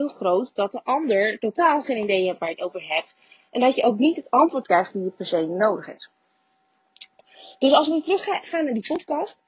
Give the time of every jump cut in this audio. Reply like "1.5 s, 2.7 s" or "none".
none